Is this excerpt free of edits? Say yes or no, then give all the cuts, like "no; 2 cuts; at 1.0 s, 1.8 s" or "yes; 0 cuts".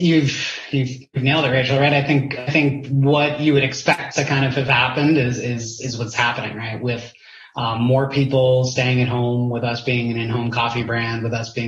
yes; 0 cuts